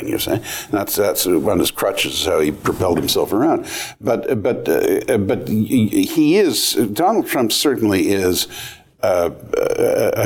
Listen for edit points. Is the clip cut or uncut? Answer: uncut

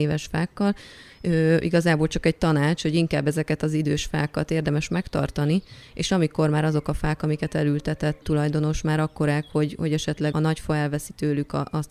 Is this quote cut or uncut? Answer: cut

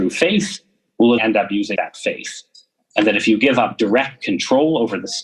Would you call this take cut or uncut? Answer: cut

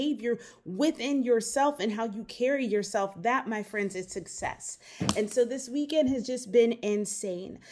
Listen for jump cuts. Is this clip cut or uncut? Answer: uncut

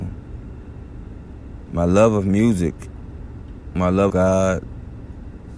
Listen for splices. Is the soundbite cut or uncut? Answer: cut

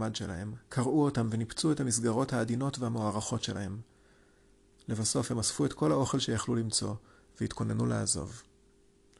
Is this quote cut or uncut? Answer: uncut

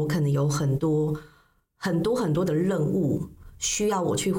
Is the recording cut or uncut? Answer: uncut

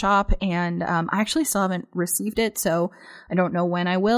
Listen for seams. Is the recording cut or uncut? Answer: uncut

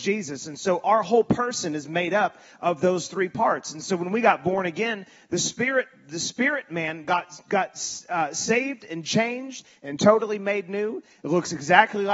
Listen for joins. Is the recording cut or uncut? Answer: uncut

